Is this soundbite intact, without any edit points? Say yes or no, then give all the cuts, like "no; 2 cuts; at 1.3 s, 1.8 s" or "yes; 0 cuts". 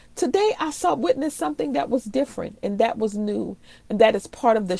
yes; 0 cuts